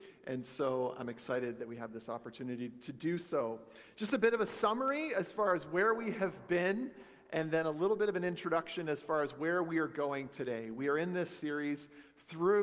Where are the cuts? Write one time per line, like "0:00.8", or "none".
none